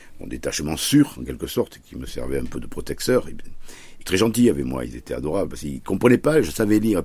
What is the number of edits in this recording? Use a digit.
1